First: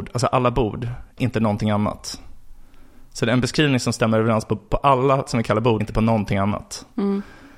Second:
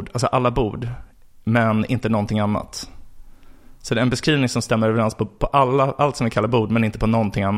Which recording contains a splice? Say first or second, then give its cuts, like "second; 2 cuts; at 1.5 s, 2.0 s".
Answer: first; 3 cuts; at 1.2 s, 5.3 s, 5.8 s